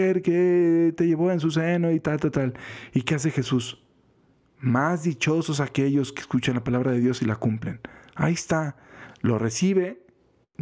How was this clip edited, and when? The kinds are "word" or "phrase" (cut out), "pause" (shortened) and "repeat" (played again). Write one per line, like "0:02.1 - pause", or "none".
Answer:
none